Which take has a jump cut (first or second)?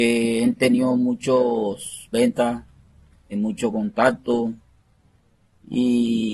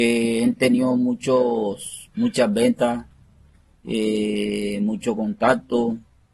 first